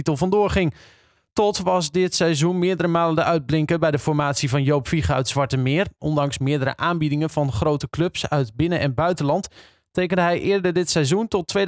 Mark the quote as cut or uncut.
uncut